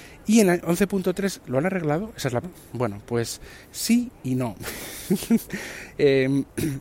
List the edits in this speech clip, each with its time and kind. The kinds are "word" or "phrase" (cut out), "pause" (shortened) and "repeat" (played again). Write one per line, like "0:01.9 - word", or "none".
0:02.4 - word
0:03.6 - pause